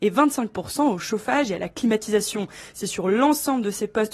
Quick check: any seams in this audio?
no; 0 cuts

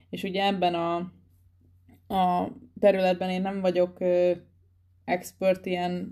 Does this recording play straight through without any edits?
yes; 0 cuts

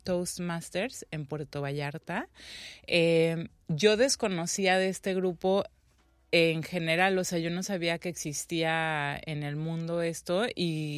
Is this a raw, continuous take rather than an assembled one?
yes; 0 cuts

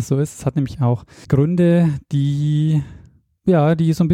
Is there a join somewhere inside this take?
yes; 1 cut; at 1.2 s

